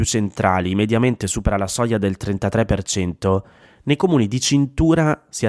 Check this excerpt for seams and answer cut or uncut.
uncut